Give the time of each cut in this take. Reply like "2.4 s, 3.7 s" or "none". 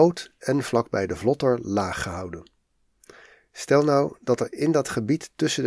none